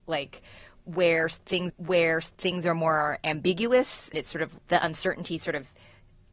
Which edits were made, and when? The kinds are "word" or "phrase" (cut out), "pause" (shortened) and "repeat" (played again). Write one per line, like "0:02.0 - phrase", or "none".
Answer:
0:01.7 - repeat
0:04.1 - word
0:04.6 - word

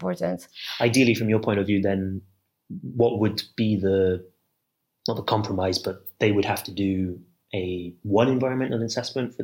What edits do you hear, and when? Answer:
none

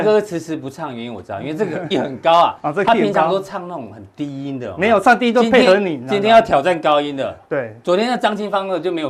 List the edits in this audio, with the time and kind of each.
0:01.9 - word

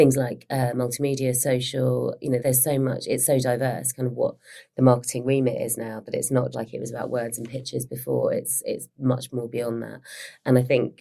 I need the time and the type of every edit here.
0:02.4 - word
0:06.5 - word

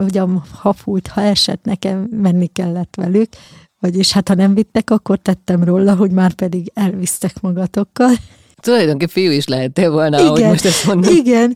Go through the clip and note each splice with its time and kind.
none

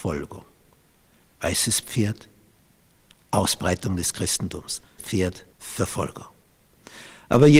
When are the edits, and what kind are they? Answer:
0:05.0 - word
0:05.5 - pause

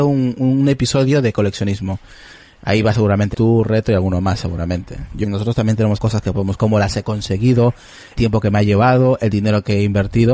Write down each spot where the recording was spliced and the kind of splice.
0:02.9 - word
0:03.3 - word
0:05.2 - word
0:06.0 - word
0:06.6 - word
0:08.1 - word

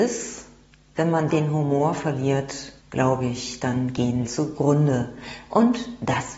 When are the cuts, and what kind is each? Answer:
0:01.3 - word
0:02.8 - pause
0:04.3 - word

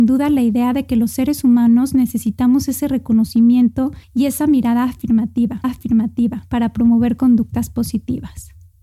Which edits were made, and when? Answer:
0:04.0 - pause
0:05.6 - repeat

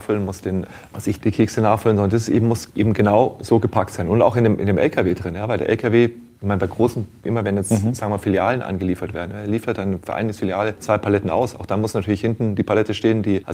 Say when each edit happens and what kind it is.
none

